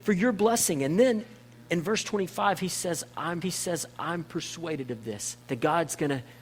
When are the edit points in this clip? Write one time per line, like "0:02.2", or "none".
0:03.4
0:05.4